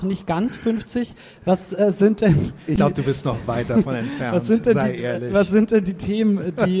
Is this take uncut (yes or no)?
yes